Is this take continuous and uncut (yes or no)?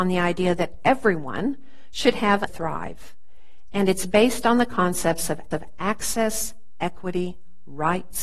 no